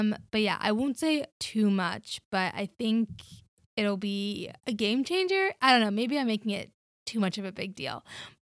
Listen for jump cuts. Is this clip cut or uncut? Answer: cut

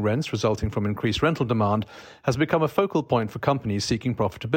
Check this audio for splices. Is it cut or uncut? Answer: uncut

